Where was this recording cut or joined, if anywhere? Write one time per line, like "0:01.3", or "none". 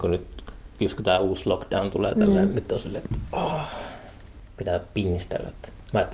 none